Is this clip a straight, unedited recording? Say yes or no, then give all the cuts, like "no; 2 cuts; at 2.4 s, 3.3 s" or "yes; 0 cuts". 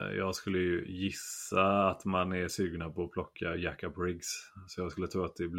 yes; 0 cuts